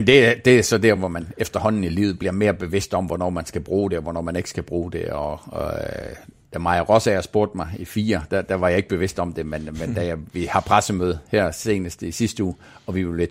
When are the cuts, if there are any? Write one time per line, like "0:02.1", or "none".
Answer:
none